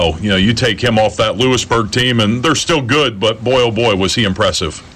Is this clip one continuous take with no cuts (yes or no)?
yes